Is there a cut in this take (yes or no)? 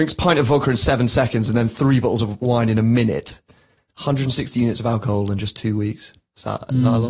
no